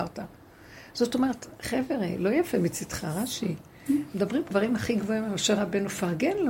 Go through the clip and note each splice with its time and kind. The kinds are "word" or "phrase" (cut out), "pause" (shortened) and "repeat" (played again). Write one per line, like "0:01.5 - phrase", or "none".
0:04.5 - word